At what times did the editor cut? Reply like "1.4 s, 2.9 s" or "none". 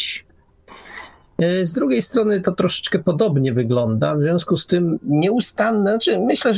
none